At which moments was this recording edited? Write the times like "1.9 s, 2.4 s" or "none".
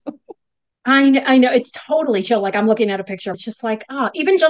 3.3 s

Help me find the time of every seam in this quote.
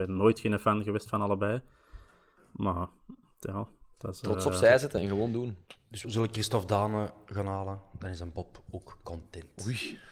6.0 s

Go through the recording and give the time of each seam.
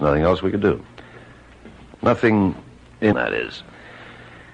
3.1 s

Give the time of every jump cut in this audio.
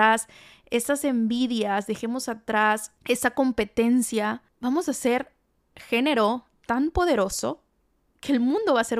5.7 s

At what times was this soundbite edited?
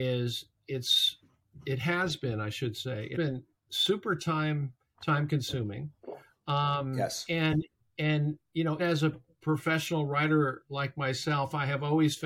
3.1 s, 4.9 s, 8.8 s

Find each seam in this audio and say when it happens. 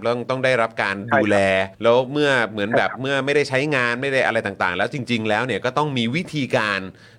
1.7 s

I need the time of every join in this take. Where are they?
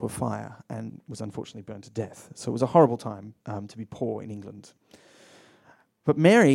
3.4 s

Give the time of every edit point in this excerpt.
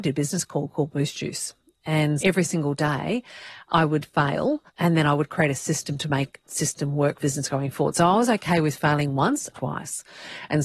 2.2 s, 4.7 s, 6.4 s, 7.2 s, 9.6 s

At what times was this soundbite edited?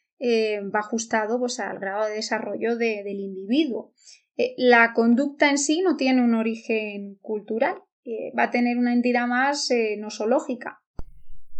none

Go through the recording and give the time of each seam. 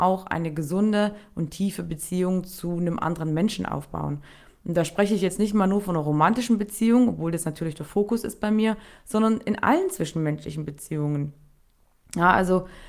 none

